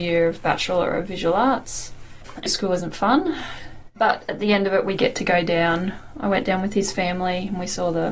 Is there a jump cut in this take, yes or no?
yes